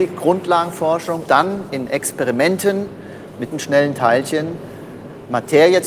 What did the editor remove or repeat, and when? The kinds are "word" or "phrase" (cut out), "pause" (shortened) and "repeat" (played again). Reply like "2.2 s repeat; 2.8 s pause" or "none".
1.3 s word; 3.5 s word